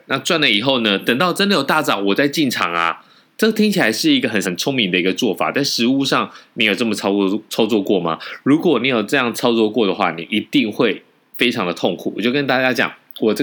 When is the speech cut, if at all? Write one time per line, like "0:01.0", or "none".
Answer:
0:04.4